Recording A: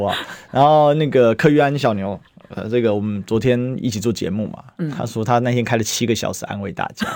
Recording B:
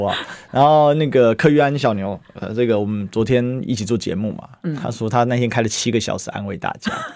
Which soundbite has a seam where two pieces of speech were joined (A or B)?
B